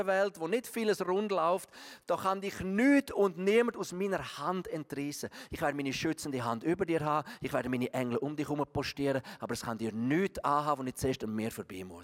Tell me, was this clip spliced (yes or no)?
no